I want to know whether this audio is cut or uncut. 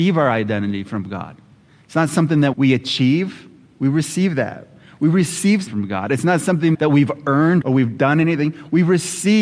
cut